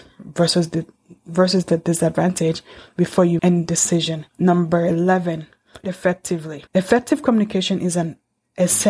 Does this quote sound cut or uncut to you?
cut